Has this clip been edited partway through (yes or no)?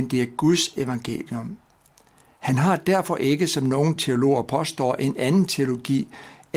no